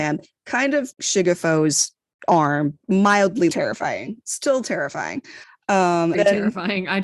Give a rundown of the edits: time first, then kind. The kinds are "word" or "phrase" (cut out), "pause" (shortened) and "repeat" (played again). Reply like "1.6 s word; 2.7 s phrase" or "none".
0.9 s word; 2.8 s word; 3.5 s word; 6.1 s word

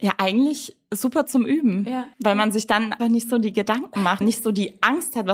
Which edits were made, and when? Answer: 2.1 s pause; 3.0 s word; 4.2 s word

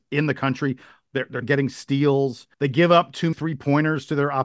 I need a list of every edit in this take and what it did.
1.4 s word; 2.5 s pause; 3.3 s word

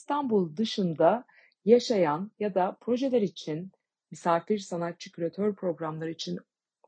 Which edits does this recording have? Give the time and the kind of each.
none

